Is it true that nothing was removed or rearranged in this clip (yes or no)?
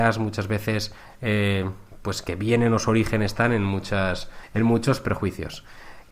yes